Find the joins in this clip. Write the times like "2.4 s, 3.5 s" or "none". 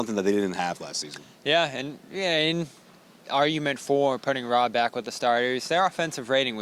none